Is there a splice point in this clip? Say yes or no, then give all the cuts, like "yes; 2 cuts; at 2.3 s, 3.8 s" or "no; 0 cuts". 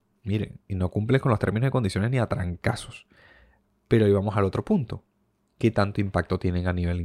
no; 0 cuts